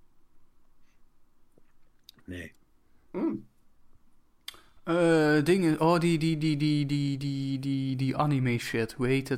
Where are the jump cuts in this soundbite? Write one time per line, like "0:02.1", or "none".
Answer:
none